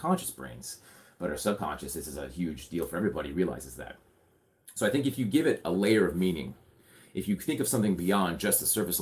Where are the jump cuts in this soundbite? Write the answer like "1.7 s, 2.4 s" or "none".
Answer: none